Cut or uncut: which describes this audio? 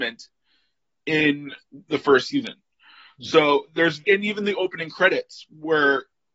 cut